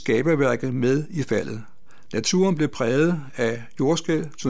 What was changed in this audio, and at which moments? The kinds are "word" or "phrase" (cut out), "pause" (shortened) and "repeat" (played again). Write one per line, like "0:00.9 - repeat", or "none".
none